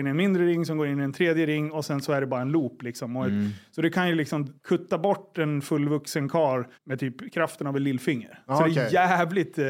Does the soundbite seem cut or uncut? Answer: cut